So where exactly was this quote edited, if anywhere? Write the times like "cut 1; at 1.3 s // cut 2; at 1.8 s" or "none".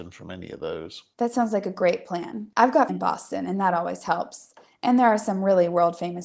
cut 1; at 2.9 s